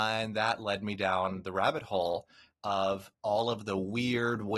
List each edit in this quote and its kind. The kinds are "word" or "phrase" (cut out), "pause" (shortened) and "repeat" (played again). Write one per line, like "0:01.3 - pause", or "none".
none